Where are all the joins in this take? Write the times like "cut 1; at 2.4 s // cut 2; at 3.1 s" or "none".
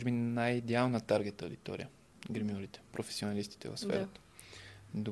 none